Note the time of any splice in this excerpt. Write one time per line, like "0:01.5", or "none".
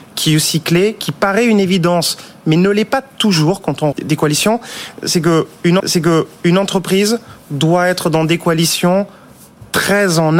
0:03.9
0:05.8